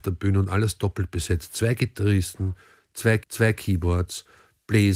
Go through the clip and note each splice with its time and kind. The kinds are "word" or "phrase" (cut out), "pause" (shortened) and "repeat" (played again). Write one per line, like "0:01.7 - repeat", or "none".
0:03.2 - repeat